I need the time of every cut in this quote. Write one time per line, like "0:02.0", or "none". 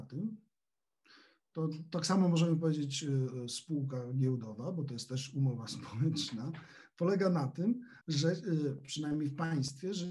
0:08.0